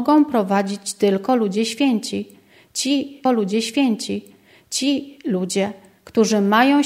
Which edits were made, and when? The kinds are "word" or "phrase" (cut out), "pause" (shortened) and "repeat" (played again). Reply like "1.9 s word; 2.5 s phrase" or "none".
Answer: 3.3 s repeat